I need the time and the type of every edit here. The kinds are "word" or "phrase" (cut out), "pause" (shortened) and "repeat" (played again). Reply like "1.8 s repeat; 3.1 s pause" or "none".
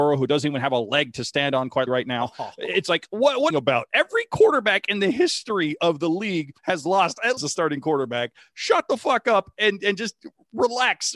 1.9 s word; 3.5 s phrase; 6.6 s pause; 7.4 s phrase